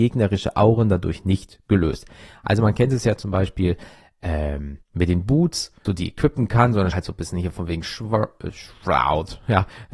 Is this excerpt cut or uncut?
cut